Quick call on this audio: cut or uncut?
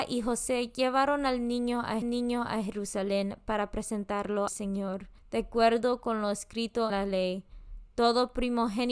cut